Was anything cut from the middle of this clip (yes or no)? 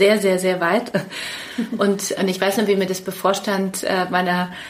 yes